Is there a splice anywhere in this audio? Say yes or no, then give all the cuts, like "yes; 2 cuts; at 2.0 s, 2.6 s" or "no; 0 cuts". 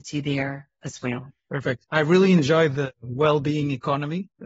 yes; 1 cut; at 1.4 s